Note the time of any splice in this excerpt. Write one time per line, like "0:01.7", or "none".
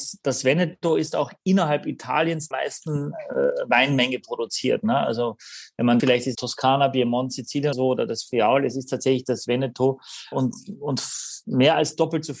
0:02.5
0:06.0
0:06.3
0:07.7
0:10.3